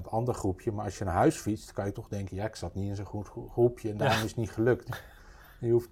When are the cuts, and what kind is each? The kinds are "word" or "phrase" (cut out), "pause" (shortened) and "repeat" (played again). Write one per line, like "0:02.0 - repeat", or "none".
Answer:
none